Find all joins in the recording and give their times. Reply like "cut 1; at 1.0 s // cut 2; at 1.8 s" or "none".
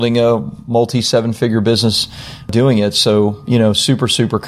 none